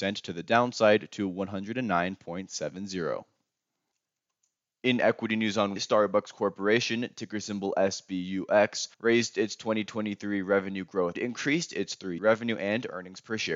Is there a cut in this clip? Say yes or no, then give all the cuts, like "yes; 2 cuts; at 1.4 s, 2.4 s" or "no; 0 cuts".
yes; 4 cuts; at 5.8 s, 8.9 s, 11.1 s, 12.2 s